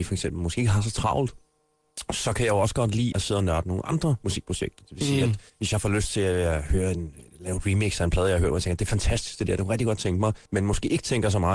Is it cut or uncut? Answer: cut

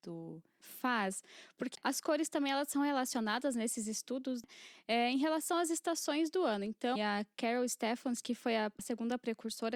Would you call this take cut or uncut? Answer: cut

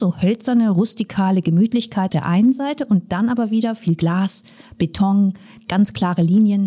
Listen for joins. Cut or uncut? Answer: cut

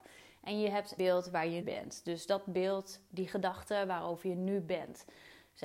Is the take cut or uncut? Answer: cut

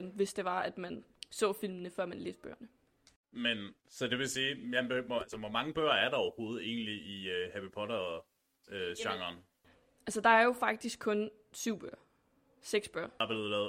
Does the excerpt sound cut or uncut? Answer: cut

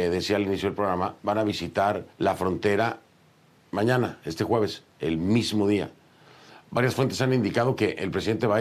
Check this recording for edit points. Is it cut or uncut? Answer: cut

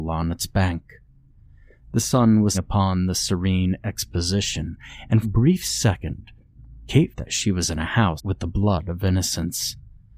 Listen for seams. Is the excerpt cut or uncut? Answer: cut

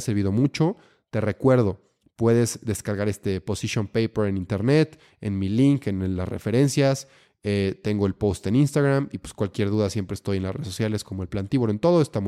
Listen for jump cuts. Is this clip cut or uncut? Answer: uncut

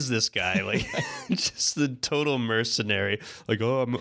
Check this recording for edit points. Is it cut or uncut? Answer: uncut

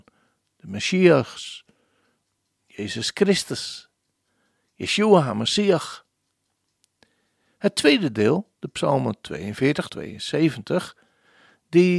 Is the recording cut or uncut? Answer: cut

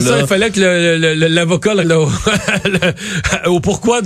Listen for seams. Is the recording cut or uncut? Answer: cut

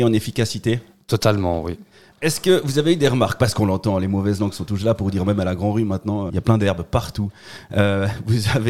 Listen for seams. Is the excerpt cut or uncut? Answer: cut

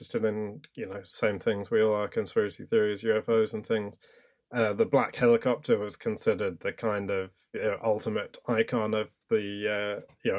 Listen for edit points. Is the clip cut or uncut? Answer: uncut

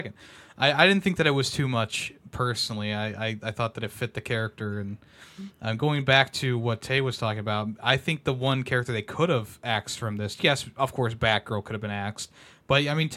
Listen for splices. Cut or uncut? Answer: uncut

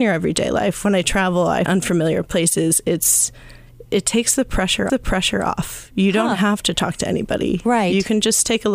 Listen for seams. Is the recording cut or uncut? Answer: cut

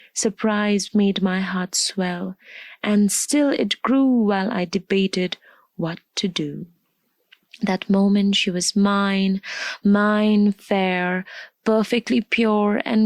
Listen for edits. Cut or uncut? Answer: uncut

